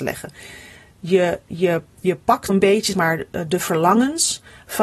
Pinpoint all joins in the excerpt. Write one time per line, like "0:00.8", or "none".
0:02.5
0:02.9